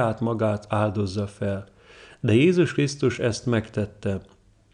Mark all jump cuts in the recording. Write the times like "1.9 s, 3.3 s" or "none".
none